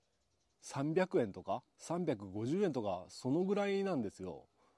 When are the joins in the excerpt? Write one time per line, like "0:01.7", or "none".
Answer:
0:01.7